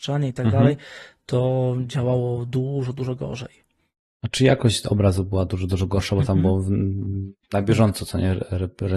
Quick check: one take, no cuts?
yes; 0 cuts

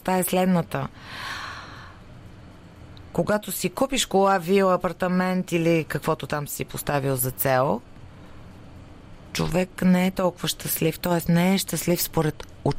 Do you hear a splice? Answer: no; 0 cuts

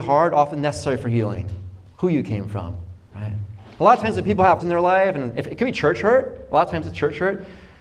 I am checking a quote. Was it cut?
yes; 2 cuts; at 1.9 s, 4.6 s

